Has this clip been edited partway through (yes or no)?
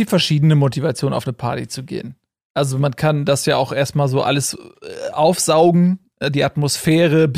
no